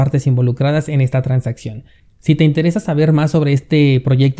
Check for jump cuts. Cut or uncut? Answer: uncut